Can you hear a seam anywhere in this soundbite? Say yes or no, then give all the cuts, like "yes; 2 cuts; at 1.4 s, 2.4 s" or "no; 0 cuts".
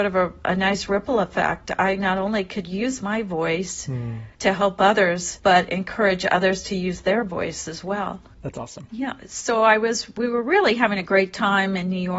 yes; 1 cut; at 4.3 s